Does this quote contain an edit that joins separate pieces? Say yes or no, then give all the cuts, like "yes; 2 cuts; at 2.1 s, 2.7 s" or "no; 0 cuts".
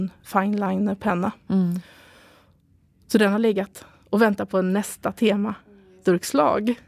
no; 0 cuts